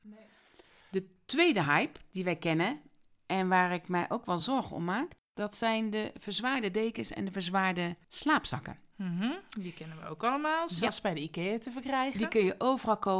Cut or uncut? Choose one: uncut